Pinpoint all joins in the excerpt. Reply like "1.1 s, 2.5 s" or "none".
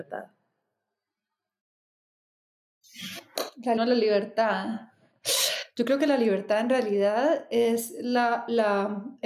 3.8 s